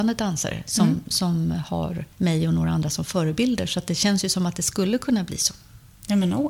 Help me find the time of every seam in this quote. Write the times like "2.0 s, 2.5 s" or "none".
2.1 s